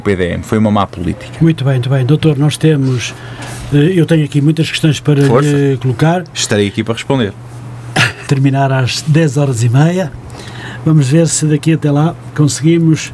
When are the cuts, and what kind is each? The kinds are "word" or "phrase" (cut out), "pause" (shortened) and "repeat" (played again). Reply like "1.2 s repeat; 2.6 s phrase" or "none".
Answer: 1.8 s repeat; 8.3 s phrase